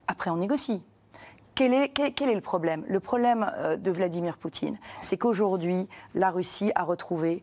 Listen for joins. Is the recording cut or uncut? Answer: uncut